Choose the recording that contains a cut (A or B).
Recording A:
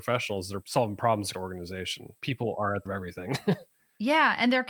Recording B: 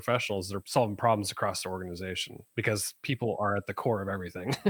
A